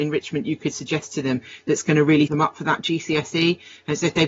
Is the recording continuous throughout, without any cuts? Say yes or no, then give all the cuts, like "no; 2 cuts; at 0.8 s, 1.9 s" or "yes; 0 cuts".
no; 1 cut; at 2.3 s